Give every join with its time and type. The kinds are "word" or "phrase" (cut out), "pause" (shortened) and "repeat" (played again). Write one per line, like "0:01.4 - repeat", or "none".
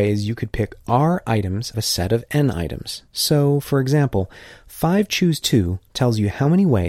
0:01.7 - phrase
0:03.1 - pause
0:05.9 - pause